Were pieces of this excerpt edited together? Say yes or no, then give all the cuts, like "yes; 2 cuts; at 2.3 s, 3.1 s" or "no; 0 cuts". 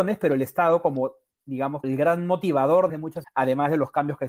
yes; 3 cuts; at 1.8 s, 2.9 s, 3.2 s